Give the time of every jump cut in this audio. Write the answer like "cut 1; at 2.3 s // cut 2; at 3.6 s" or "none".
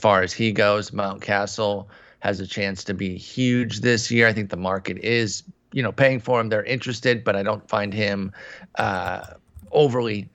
none